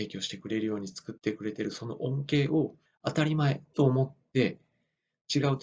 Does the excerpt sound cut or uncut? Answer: cut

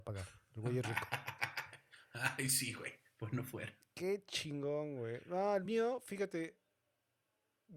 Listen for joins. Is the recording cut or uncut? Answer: uncut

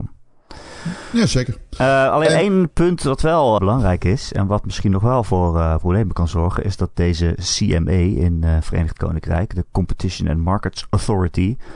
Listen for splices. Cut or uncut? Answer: cut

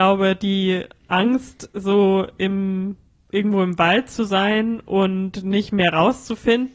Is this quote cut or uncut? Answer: uncut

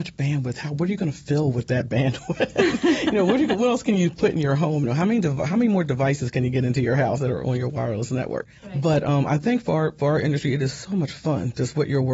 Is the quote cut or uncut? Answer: cut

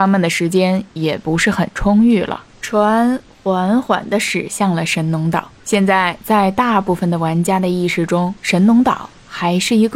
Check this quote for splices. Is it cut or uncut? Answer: cut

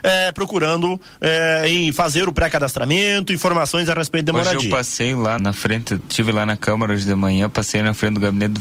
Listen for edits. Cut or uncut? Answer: cut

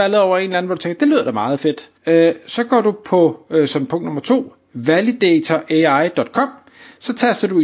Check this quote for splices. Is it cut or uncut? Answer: cut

